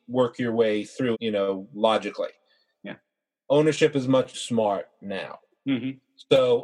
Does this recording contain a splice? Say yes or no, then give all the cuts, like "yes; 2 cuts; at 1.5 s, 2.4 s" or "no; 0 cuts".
yes; 2 cuts; at 1.1 s, 4.3 s